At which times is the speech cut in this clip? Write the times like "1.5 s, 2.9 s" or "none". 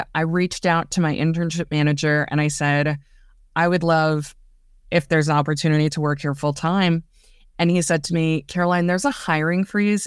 none